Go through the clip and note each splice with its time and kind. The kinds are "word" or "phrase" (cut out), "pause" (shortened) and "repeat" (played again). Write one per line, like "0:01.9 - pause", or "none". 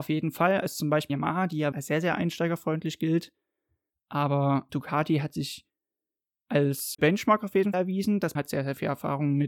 0:01.1 - word
0:01.7 - word
0:04.7 - word
0:07.0 - word
0:07.7 - word
0:08.3 - word

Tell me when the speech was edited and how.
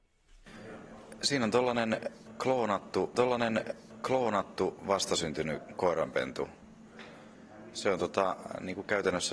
0:03.1 - repeat

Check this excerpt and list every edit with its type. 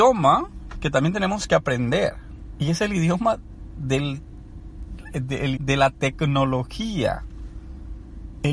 0:05.6 - word

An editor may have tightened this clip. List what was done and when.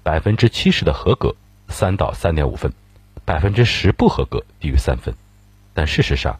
none

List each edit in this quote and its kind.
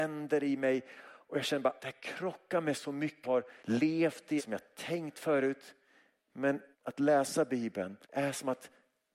0:01.8 - word
0:03.2 - phrase
0:03.6 - pause
0:04.4 - word
0:06.7 - pause
0:08.0 - pause

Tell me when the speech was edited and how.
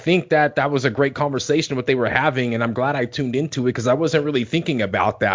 none

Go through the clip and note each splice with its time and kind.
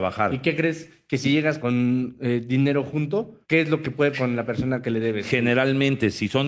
0:01.6 - word
0:03.4 - pause
0:04.1 - word

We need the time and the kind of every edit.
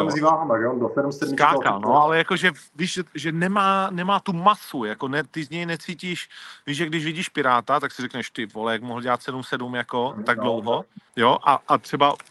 0:02.7 - pause
0:11.1 - pause

